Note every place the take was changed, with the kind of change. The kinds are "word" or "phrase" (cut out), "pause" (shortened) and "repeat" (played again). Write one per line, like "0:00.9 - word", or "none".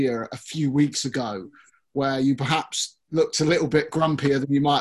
none